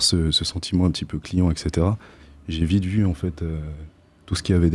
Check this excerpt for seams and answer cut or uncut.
uncut